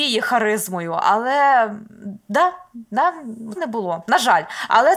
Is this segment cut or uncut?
cut